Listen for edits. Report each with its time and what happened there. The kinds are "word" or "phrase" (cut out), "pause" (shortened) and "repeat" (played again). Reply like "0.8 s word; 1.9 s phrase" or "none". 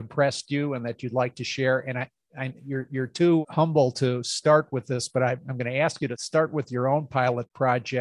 none